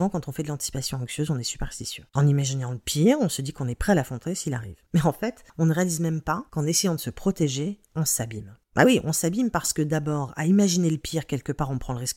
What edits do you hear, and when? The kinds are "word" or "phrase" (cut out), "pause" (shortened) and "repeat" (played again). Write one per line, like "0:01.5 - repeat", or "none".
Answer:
0:02.1 - pause
0:05.5 - pause
0:08.6 - pause